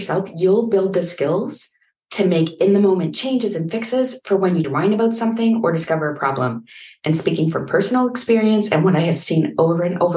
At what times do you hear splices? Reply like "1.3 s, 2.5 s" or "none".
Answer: 4.6 s